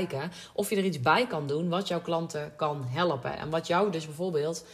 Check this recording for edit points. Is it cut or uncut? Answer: uncut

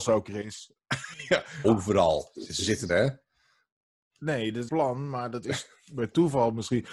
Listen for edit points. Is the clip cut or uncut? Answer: cut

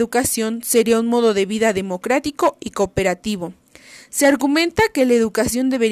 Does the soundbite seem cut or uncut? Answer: uncut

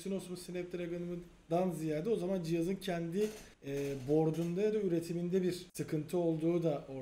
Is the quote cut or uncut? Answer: cut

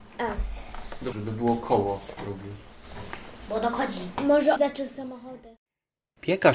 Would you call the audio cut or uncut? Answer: cut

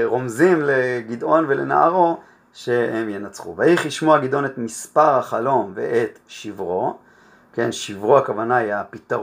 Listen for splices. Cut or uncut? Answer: uncut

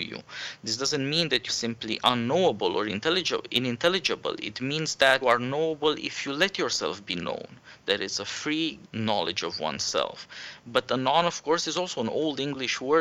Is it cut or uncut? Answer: cut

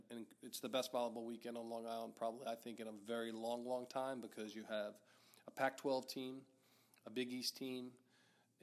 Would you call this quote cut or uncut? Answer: uncut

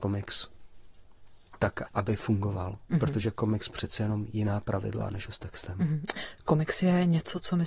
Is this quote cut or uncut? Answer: cut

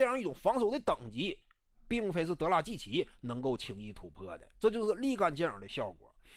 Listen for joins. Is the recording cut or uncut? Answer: uncut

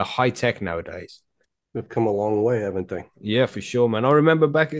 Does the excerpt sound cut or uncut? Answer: uncut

